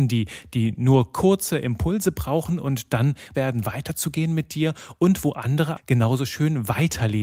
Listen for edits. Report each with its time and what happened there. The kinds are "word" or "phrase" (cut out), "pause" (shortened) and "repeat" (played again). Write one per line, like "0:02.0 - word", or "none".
0:03.3 - word
0:05.8 - word